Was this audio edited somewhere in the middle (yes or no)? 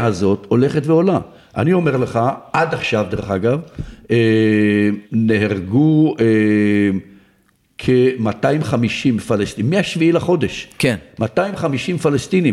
yes